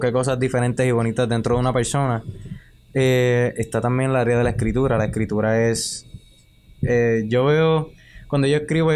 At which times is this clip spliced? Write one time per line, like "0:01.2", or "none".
none